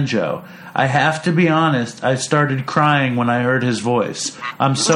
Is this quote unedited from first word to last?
yes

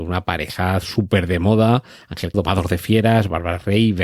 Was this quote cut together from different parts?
yes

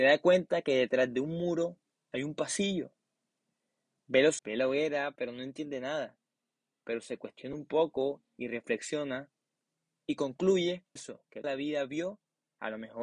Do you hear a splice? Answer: yes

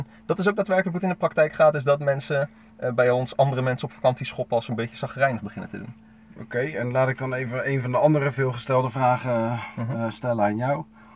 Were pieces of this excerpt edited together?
no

